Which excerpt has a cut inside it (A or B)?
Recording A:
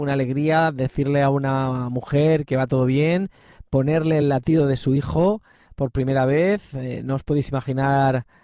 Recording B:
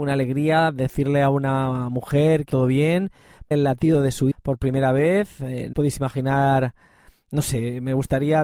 B